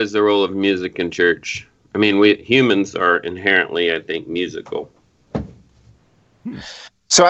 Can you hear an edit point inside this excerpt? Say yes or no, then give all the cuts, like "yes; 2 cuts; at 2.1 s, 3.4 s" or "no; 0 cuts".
no; 0 cuts